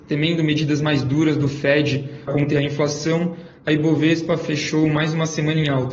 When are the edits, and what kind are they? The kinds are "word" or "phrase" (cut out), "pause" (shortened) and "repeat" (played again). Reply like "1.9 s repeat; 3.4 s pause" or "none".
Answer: 2.3 s word